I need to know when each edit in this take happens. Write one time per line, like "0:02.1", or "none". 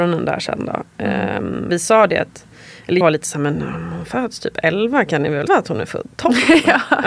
0:01.7
0:03.0
0:05.5